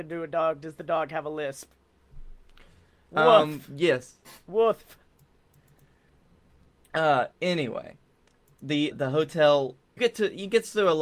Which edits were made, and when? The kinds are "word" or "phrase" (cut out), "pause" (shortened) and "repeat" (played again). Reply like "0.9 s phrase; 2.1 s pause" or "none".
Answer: 7.3 s pause; 8.9 s word; 10.0 s word